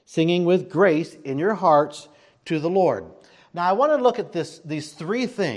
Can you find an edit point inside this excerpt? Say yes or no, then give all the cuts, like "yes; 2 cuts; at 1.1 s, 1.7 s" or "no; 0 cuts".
no; 0 cuts